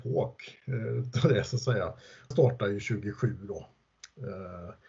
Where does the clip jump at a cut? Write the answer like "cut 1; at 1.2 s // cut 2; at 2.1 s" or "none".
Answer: cut 1; at 2.3 s